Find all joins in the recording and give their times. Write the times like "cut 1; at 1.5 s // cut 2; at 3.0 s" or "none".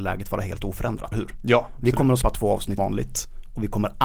cut 1; at 1.1 s // cut 2; at 2.2 s // cut 3; at 2.8 s